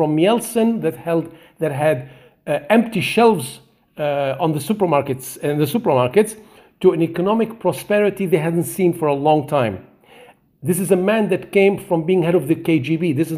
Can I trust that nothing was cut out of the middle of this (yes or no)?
yes